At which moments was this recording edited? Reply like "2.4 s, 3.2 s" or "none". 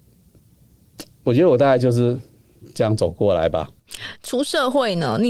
none